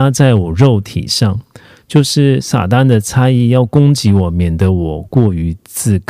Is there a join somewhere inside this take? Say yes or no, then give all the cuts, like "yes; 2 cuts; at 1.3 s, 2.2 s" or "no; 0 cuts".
no; 0 cuts